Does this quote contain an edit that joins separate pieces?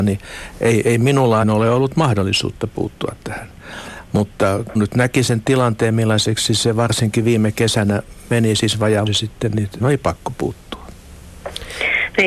yes; 4 cuts; at 1.4 s, 4.7 s, 9.1 s, 9.8 s

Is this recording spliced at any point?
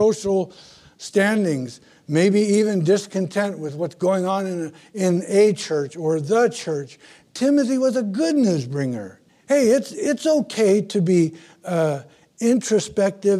yes; 1 cut; at 9.3 s

